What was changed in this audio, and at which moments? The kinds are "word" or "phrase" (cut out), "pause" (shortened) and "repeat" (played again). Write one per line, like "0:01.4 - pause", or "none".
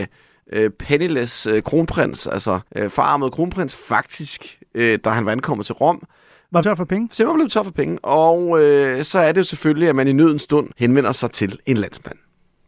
0:02.7 - pause
0:06.6 - phrase
0:10.7 - pause

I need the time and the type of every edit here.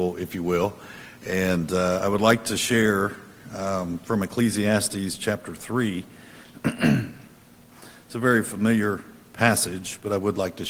none

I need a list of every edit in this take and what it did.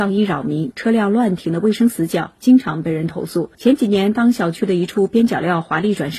0:03.5 - pause

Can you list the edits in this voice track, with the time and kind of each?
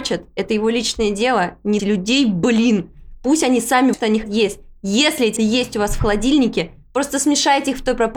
0:01.8 - word
0:03.9 - word
0:04.2 - word
0:05.4 - word

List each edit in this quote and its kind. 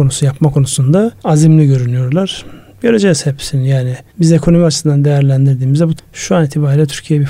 0:01.2 - pause
0:04.1 - pause
0:06.0 - word

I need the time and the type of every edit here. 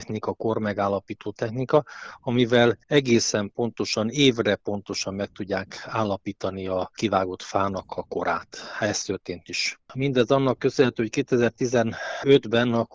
0:02.8 - pause
0:09.4 - word

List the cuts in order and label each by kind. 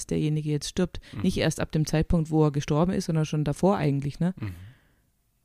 none

